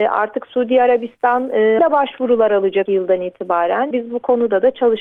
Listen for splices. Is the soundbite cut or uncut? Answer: cut